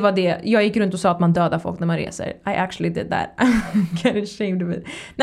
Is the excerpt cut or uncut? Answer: uncut